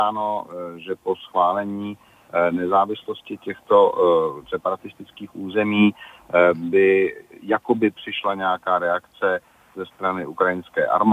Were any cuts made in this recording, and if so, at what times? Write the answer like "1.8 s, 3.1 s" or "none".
none